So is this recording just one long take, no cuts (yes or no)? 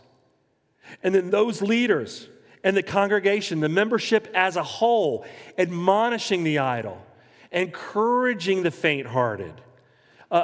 yes